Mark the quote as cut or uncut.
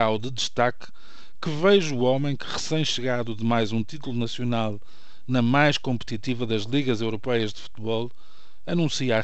uncut